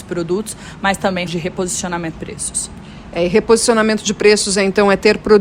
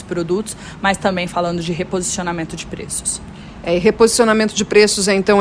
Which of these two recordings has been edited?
first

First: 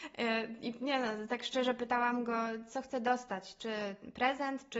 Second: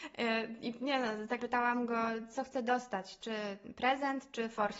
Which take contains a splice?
second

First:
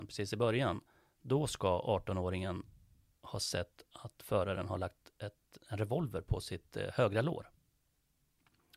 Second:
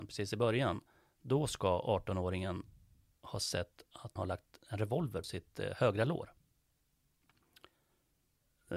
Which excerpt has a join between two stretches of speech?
second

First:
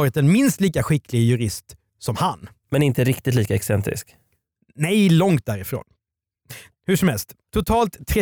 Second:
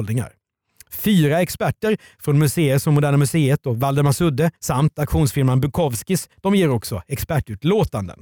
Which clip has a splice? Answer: second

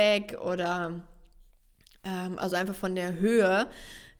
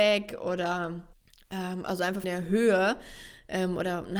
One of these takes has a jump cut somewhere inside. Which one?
second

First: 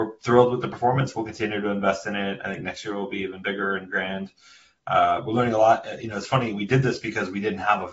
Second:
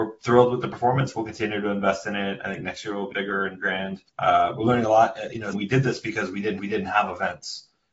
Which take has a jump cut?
second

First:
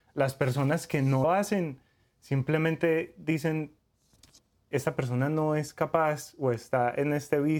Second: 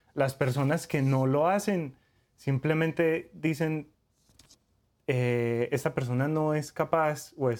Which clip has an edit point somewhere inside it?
first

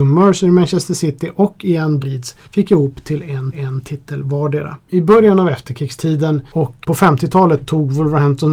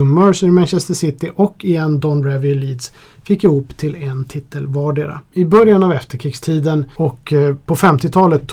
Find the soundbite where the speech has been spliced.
first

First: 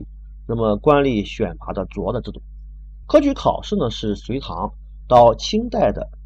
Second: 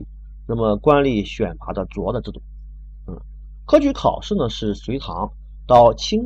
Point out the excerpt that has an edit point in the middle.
first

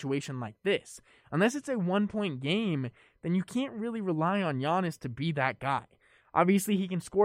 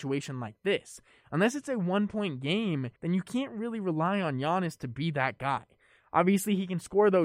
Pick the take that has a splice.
second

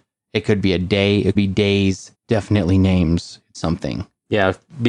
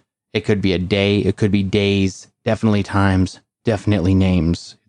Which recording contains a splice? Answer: first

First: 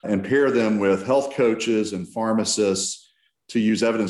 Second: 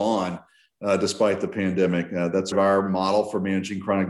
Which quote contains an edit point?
second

